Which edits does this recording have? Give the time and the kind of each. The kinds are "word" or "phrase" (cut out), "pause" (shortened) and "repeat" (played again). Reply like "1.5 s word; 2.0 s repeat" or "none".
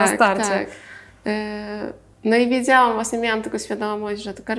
2.1 s pause

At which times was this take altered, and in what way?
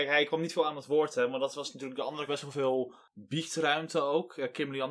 2.3 s word

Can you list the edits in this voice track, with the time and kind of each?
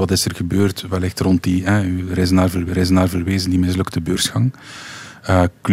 2.7 s repeat

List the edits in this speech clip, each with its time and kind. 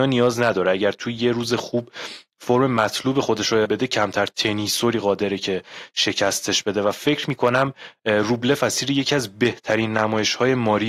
3.7 s word

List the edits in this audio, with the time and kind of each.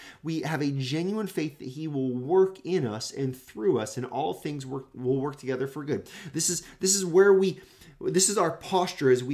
none

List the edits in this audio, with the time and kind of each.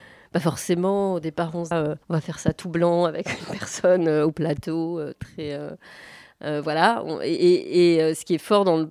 1.7 s phrase; 2.0 s pause

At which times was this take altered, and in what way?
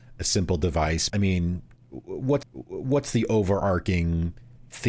1.1 s word; 2.4 s repeat

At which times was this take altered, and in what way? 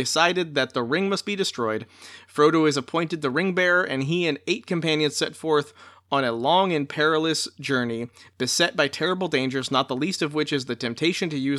none

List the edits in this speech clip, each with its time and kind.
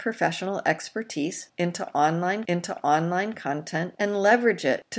2.4 s repeat

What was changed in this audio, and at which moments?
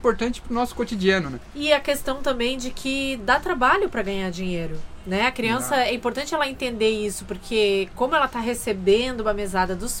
none

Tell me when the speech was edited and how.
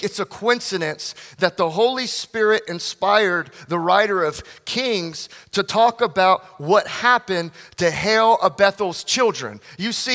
none

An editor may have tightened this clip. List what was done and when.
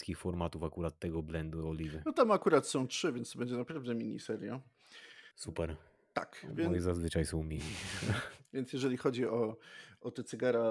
5.3 s pause

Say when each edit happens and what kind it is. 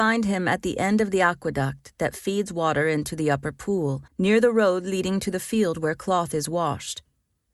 4.1 s pause

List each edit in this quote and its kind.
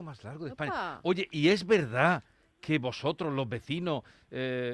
none

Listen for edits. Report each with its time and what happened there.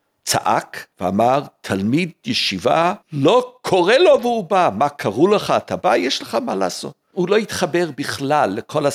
0.9 s pause; 3.0 s pause; 7.0 s pause

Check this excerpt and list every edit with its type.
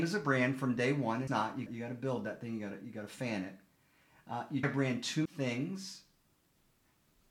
1.3 s word; 1.7 s word; 4.6 s word; 5.3 s word

